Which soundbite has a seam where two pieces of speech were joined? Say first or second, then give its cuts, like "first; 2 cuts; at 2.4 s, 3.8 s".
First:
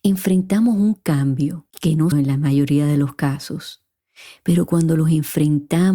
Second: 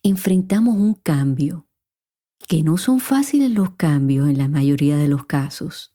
first; 2 cuts; at 1.7 s, 2.1 s